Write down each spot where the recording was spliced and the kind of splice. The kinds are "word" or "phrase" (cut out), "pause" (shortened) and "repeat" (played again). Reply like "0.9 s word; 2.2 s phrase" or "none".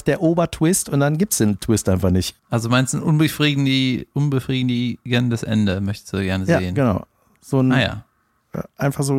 2.4 s pause